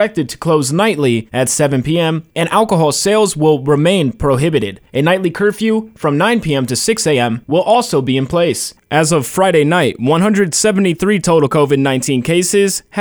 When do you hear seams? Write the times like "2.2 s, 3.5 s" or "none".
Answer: none